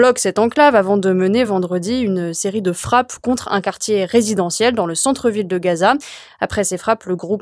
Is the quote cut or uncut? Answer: uncut